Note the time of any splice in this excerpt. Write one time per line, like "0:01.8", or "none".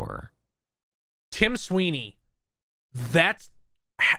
none